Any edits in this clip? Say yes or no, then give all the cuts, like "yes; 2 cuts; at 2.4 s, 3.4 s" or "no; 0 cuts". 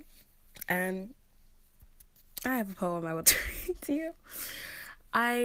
yes; 1 cut; at 3.2 s